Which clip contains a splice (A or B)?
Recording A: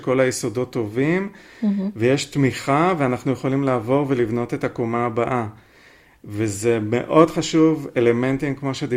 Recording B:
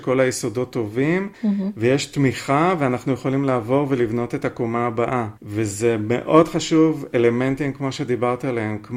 B